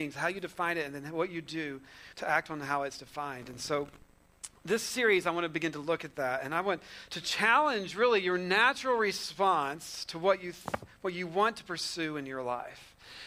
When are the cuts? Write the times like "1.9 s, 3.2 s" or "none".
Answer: 2.1 s